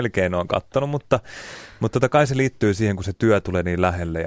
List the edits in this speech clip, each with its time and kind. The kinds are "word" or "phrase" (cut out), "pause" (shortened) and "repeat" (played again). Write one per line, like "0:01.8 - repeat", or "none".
none